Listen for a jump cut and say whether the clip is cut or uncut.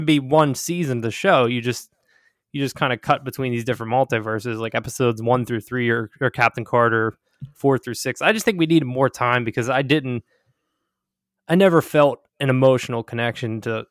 cut